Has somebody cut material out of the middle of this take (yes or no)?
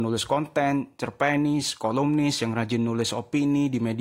no